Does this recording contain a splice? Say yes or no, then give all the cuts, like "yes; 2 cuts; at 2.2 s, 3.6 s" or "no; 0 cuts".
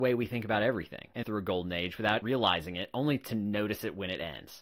yes; 1 cut; at 1.2 s